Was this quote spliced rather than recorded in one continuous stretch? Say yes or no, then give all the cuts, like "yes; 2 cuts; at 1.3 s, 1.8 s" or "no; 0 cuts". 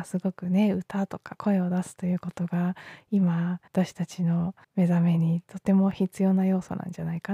yes; 2 cuts; at 3.7 s, 4.6 s